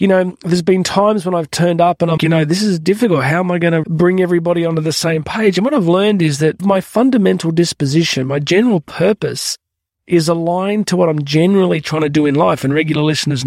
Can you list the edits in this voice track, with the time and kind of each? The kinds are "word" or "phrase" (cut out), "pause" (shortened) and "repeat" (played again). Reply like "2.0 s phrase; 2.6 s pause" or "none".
2.2 s word; 3.8 s word; 6.6 s word